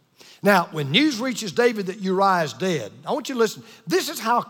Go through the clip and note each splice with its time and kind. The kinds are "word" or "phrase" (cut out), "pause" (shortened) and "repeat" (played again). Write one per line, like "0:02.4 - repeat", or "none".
none

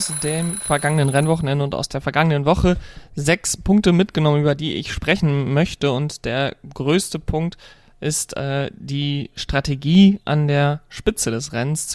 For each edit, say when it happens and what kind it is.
none

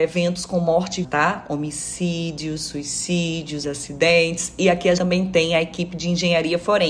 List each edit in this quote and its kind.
0:01.0 - word
0:03.6 - word
0:05.0 - word

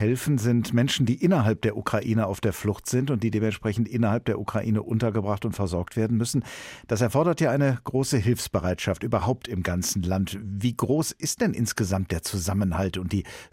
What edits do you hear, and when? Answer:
none

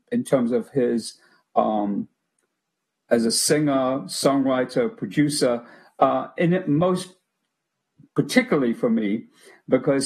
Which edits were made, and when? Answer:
none

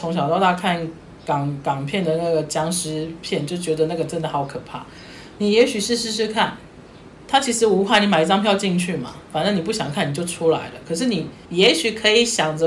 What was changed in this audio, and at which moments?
0:11.4 - pause

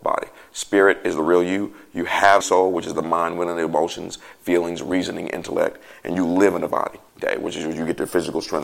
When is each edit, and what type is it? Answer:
0:02.4 - word
0:06.7 - word
0:07.1 - pause

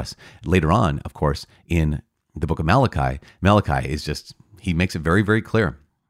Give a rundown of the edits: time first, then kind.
none

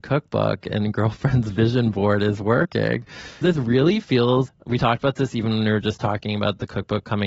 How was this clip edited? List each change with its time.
0:03.4 - word
0:04.5 - word

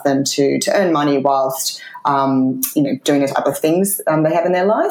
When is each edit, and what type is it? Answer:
none

